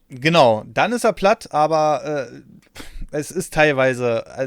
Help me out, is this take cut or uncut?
uncut